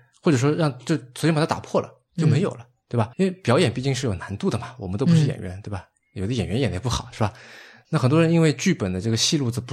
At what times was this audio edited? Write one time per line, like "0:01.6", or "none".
0:03.1